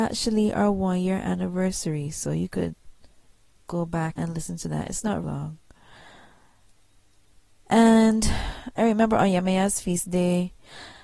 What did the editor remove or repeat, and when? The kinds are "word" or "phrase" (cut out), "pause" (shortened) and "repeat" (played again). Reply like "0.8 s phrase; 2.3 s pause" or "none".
4.1 s word; 5.2 s word